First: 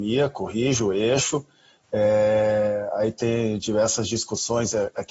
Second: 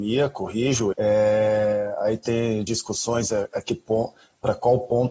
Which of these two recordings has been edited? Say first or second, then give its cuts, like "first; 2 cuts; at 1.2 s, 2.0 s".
second; 2 cuts; at 0.9 s, 2.7 s